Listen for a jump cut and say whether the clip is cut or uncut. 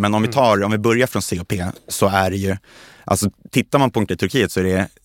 cut